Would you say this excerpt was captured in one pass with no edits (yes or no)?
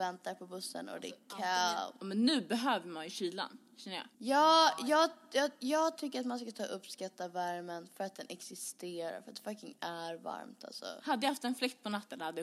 no